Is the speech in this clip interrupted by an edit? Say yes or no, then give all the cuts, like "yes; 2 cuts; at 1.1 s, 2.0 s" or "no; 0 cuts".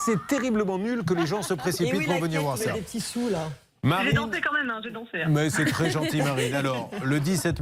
no; 0 cuts